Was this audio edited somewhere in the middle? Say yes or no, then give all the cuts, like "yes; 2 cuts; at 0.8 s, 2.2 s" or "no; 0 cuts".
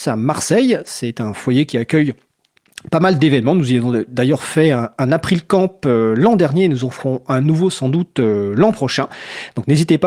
no; 0 cuts